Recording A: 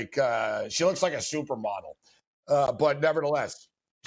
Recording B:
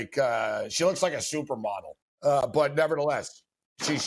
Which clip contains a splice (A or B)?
B